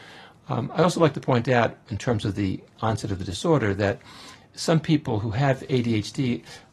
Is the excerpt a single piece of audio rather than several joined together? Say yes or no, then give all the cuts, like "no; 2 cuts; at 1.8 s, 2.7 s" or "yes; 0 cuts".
yes; 0 cuts